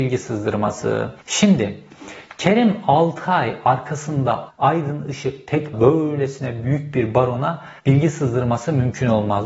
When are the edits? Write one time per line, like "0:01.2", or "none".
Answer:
0:01.2
0:04.5
0:05.7
0:07.8

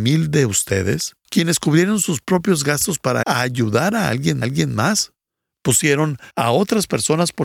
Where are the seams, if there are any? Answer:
0:01.3
0:03.2
0:04.4
0:06.3

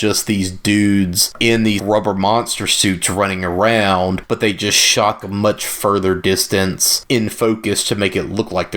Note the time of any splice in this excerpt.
0:01.8
0:05.2

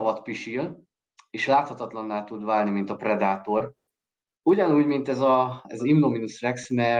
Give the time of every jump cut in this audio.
0:05.8

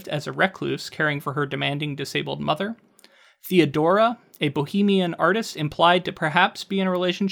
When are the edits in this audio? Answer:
none

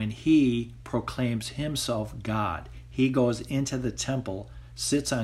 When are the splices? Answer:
none

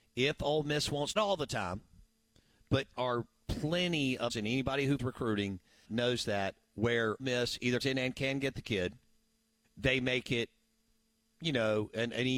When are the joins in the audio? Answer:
0:01.2
0:02.9
0:04.3
0:05.0
0:05.8
0:07.2
0:07.8
0:09.6

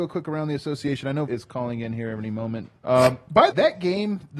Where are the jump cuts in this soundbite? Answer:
0:01.3
0:02.8
0:03.5

